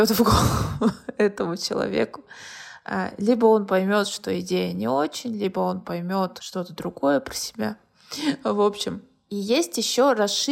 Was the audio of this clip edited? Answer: no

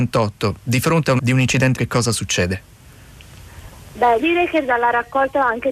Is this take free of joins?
no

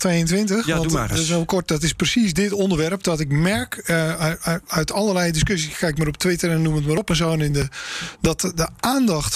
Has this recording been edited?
no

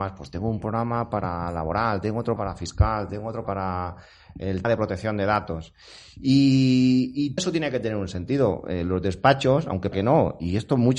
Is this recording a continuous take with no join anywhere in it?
no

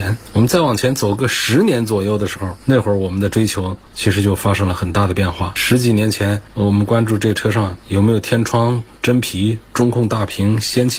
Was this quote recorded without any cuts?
no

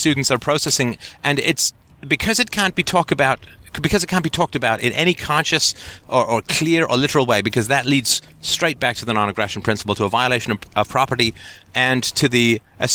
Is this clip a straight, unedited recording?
yes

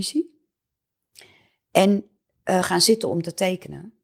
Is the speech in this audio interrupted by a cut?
no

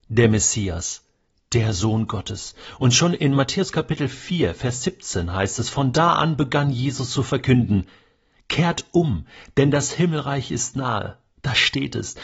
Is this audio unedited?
yes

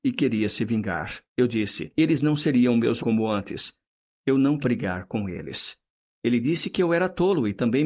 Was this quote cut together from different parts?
yes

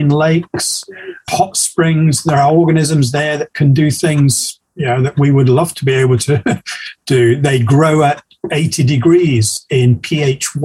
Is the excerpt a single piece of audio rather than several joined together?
yes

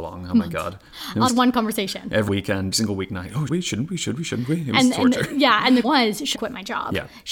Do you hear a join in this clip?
yes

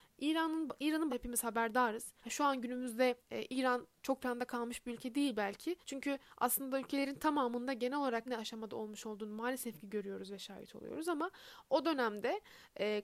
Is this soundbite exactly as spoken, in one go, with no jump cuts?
no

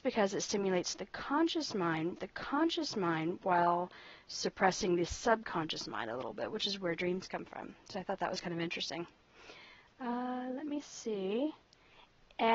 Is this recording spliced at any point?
yes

